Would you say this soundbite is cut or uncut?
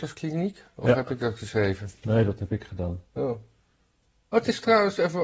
uncut